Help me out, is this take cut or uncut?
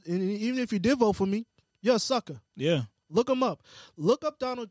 uncut